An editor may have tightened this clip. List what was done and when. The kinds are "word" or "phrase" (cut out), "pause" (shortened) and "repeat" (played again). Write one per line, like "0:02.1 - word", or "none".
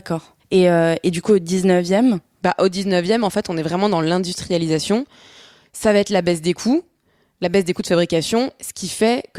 none